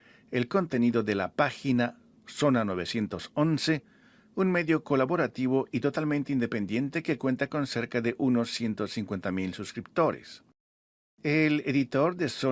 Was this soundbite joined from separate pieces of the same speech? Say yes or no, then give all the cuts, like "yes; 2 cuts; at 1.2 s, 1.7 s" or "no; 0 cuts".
no; 0 cuts